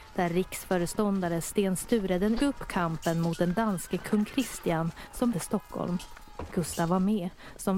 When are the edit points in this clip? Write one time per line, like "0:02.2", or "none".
0:02.4
0:05.3